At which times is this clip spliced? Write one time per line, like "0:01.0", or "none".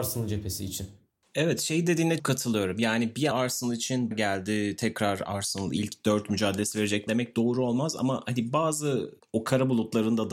0:02.2
0:03.3
0:04.1
0:07.1